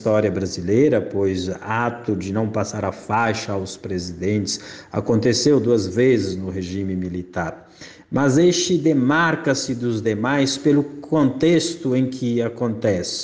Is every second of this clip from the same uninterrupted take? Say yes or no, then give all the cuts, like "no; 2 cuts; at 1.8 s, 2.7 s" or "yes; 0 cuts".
yes; 0 cuts